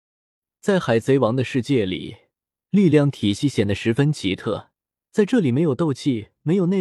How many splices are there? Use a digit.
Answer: 0